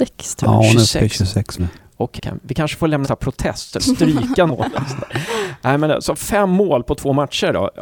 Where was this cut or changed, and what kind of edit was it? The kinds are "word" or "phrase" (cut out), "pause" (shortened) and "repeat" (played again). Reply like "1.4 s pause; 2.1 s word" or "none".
1.6 s word; 2.2 s word; 3.0 s word; 3.8 s word; 4.5 s word